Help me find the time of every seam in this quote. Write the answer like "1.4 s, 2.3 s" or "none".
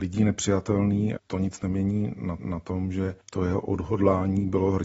1.2 s, 2.4 s, 3.2 s